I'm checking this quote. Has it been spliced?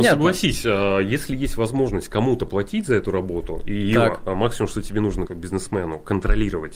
yes; 1 cut; at 5.3 s

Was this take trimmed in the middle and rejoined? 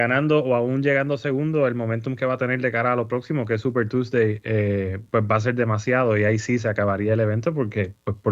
no; 0 cuts

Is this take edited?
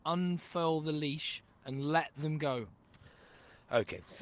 no; 0 cuts

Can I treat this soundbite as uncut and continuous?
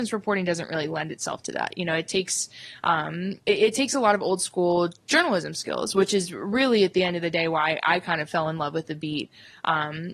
no; 1 cut; at 3.4 s

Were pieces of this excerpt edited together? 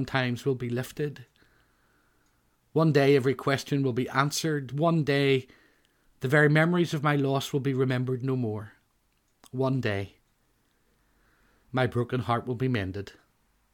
no; 0 cuts

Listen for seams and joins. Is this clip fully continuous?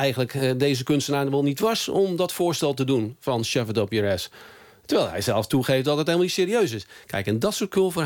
yes; 0 cuts

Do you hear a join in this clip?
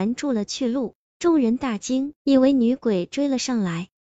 yes; 1 cut; at 2.2 s

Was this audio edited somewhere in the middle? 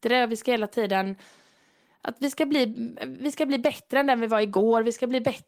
no; 0 cuts

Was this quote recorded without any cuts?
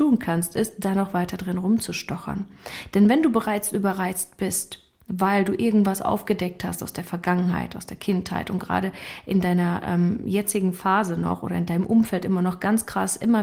yes; 0 cuts

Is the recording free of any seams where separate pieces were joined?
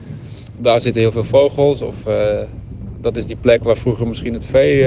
yes; 0 cuts

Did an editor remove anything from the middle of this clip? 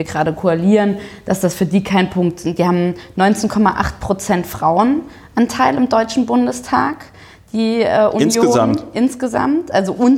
no; 0 cuts

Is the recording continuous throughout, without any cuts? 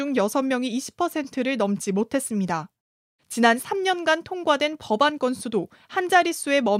yes; 0 cuts

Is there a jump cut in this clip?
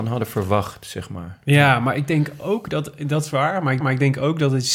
yes; 1 cut; at 3.8 s

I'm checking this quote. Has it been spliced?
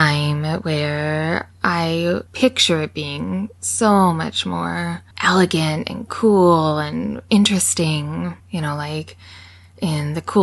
yes; 3 cuts; at 2.3 s, 5.1 s, 8.4 s

